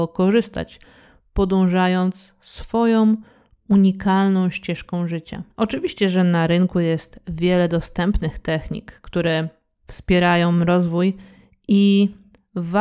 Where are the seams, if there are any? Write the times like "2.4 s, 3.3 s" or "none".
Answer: 5.5 s